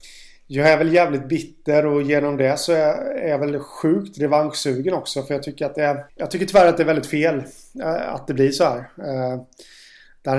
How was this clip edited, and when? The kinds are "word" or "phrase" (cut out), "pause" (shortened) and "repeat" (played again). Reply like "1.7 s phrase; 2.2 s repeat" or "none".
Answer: 6.1 s pause